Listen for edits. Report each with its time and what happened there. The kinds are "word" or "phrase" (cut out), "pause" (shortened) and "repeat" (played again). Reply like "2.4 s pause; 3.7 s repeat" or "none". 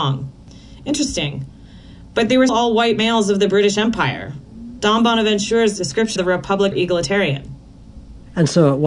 2.5 s word; 6.2 s word; 6.7 s phrase